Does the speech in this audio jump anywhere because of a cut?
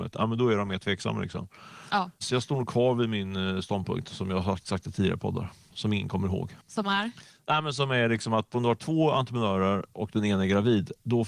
yes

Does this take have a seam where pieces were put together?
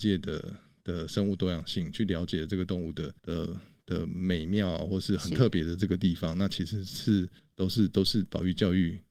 yes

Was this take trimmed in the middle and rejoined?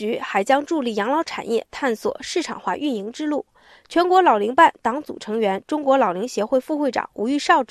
no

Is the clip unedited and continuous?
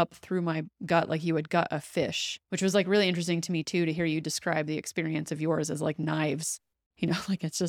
no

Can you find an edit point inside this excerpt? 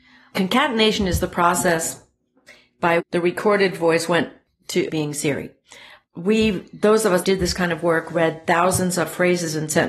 yes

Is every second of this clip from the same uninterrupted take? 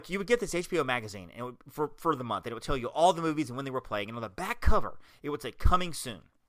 yes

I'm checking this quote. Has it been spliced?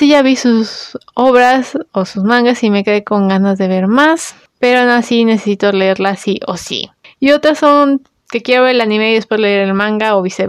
no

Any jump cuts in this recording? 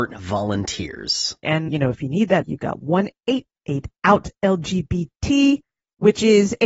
yes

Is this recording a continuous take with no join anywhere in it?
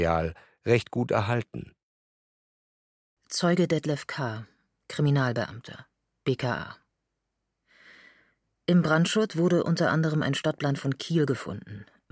yes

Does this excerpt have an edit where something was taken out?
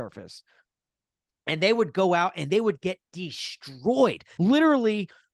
yes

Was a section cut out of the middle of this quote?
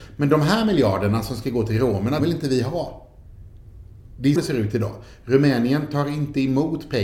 yes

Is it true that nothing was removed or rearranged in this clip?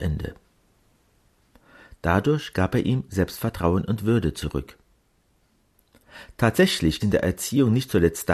no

